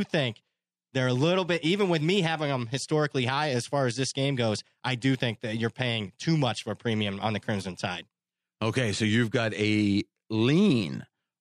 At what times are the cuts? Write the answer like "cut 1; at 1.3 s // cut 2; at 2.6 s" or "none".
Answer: none